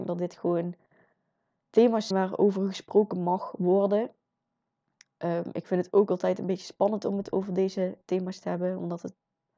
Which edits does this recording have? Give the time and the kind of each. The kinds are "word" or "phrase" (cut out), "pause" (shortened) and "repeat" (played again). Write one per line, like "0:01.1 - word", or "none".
0:02.1 - word